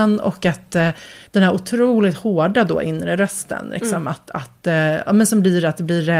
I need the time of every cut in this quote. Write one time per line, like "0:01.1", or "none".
0:01.3